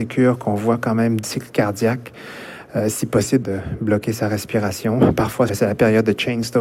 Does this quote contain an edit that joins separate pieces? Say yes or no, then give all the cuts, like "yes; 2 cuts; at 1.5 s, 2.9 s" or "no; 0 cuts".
yes; 3 cuts; at 1.2 s, 3.4 s, 5.5 s